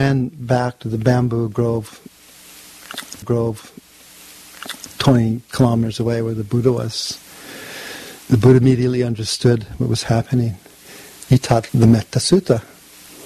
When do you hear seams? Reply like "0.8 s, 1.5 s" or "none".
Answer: 3.2 s, 8.2 s, 11.7 s